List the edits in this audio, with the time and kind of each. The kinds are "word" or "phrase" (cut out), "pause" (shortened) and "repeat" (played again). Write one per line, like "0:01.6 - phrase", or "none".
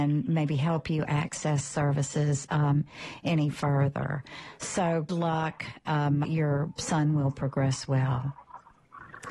0:05.1 - word
0:06.2 - phrase